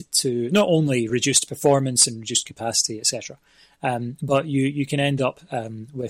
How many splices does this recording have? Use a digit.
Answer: 0